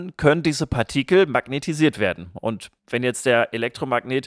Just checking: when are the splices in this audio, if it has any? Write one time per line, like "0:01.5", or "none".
none